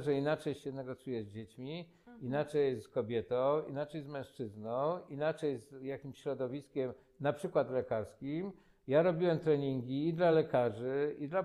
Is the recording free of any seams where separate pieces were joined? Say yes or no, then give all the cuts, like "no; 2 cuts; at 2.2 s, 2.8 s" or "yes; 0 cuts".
yes; 0 cuts